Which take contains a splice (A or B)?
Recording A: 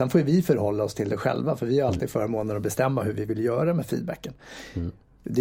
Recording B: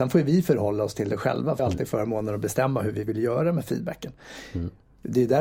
B